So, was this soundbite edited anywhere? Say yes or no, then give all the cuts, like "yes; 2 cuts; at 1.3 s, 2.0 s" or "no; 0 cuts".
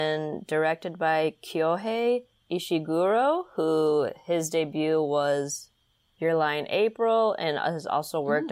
no; 0 cuts